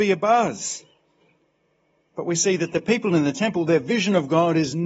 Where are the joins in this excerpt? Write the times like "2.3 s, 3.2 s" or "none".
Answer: none